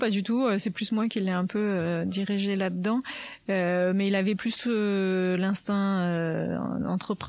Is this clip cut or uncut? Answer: uncut